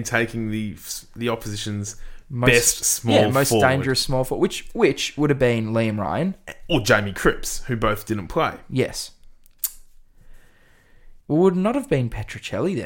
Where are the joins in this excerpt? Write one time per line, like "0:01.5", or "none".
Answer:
0:11.2